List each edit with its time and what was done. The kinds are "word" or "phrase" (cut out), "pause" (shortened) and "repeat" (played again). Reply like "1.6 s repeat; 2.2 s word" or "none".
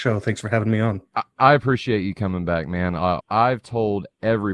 3.2 s phrase